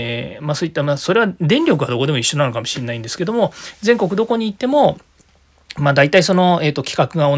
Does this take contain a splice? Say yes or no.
no